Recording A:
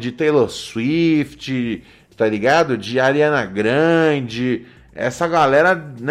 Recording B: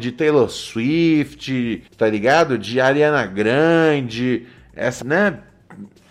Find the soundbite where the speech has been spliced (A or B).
B